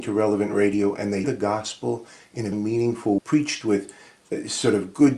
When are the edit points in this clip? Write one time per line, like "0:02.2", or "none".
0:01.2
0:02.5
0:03.2